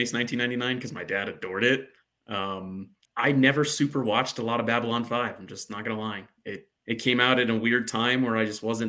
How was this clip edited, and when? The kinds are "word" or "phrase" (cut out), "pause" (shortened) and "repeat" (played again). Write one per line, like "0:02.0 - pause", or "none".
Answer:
0:03.0 - pause
0:06.8 - pause